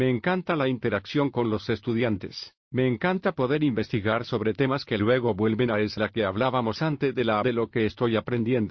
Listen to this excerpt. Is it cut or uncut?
cut